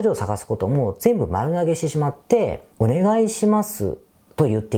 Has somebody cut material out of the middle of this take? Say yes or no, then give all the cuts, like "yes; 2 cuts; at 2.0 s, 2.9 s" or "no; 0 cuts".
yes; 1 cut; at 2.7 s